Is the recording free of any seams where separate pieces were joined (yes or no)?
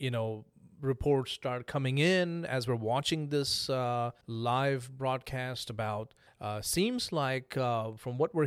no